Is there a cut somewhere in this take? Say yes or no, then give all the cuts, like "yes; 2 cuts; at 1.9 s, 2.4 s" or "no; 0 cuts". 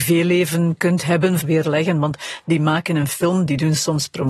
yes; 1 cut; at 1.4 s